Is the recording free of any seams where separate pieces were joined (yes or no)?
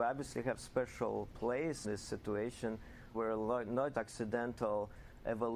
no